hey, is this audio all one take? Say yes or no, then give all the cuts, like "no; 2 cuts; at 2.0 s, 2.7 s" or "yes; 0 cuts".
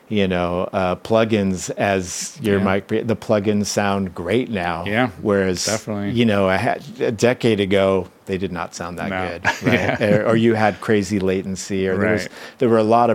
yes; 0 cuts